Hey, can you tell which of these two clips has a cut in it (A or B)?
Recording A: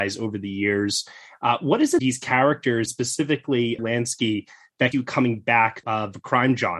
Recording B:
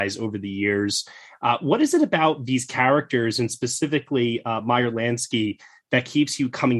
A